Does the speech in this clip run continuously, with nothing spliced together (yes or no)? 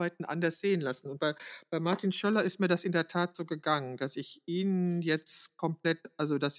yes